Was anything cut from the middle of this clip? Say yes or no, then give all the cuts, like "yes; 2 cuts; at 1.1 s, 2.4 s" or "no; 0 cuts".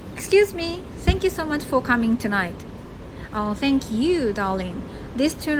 no; 0 cuts